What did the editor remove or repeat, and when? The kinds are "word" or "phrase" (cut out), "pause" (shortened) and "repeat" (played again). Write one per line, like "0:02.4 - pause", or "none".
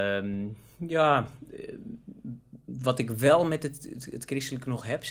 none